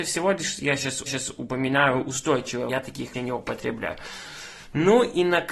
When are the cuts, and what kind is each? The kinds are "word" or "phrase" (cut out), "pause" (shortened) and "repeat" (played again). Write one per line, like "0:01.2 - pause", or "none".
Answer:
0:01.1 - repeat
0:02.7 - word
0:03.1 - word